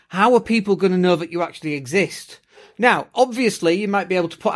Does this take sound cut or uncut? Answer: uncut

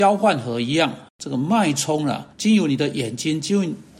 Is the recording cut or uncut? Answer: cut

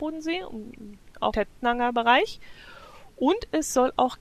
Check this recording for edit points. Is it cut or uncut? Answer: cut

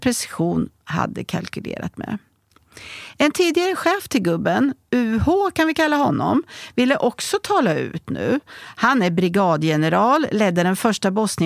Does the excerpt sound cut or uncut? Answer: uncut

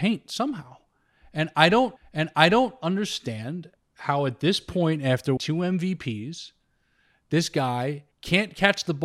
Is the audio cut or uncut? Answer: cut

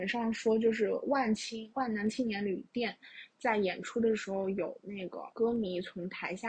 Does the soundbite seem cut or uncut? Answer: cut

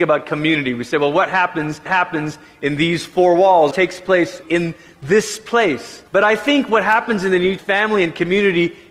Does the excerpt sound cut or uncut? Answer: cut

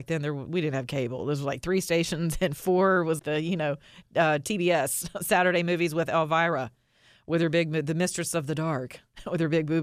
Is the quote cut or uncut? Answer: cut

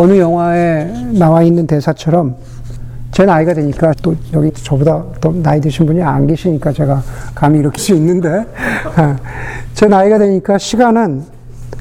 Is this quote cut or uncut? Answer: cut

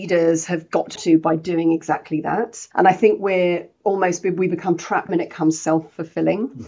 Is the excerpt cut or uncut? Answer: cut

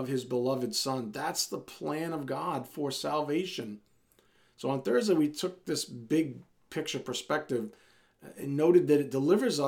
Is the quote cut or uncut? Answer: uncut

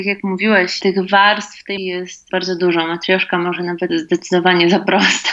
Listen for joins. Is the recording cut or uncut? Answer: cut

